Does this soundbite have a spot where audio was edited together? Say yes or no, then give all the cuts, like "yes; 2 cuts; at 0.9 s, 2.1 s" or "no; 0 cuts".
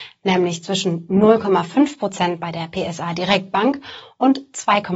no; 0 cuts